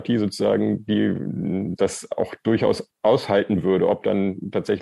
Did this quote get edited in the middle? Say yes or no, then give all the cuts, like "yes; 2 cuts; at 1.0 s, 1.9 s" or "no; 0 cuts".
yes; 1 cut; at 1.8 s